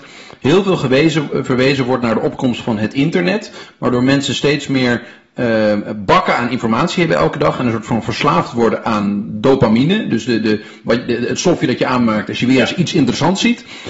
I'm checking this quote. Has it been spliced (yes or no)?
no